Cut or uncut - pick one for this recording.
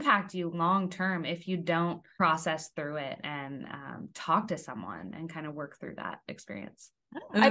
uncut